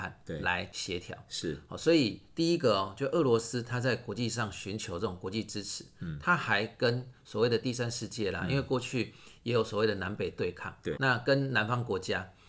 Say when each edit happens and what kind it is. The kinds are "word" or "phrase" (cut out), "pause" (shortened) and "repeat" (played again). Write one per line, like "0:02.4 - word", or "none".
0:10.9 - word